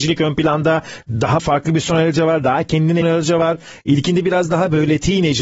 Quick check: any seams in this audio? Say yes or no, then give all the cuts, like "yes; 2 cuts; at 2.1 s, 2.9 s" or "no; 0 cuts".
yes; 2 cuts; at 1.4 s, 3.0 s